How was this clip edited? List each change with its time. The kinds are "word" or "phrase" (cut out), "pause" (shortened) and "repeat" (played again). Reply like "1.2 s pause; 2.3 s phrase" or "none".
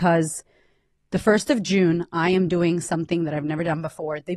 none